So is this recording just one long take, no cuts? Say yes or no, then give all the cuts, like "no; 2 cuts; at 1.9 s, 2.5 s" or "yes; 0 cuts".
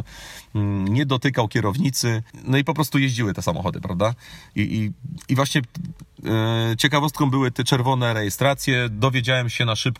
yes; 0 cuts